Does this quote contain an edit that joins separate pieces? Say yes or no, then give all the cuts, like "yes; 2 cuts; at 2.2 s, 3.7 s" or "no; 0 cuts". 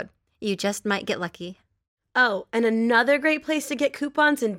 no; 0 cuts